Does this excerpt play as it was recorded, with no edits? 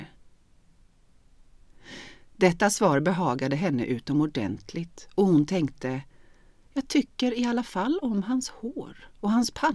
yes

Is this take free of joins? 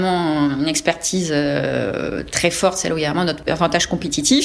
yes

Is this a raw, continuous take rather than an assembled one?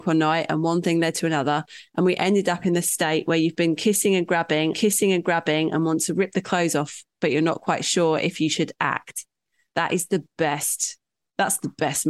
no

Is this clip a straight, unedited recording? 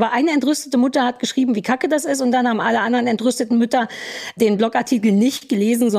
yes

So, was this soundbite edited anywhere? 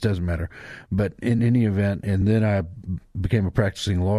no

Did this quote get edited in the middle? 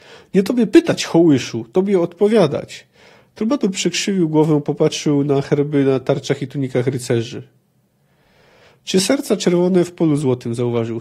no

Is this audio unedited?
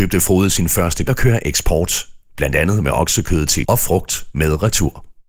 no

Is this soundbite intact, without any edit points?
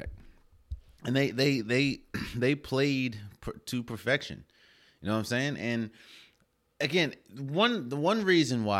yes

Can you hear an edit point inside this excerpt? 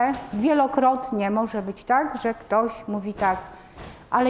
no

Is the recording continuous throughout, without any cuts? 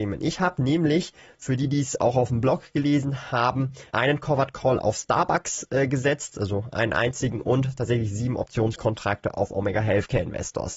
no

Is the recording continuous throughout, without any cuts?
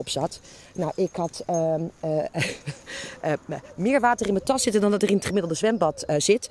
yes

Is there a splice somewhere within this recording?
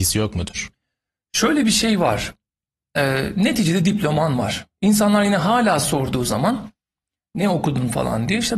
no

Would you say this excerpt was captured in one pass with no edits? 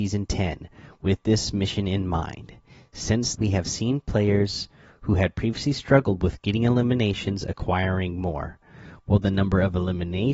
no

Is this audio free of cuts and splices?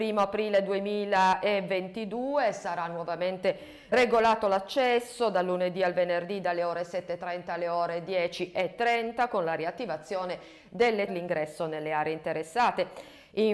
no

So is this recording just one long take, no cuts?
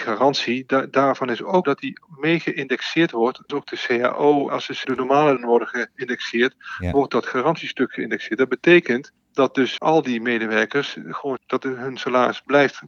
no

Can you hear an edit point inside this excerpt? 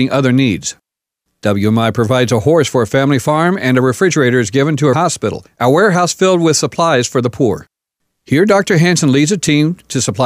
yes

